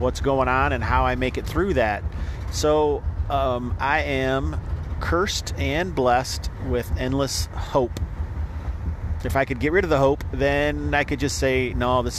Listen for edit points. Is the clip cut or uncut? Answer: uncut